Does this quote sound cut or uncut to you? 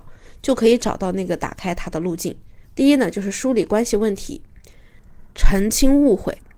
cut